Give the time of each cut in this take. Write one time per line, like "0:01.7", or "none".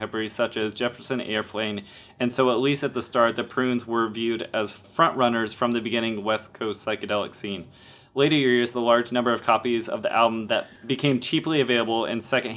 none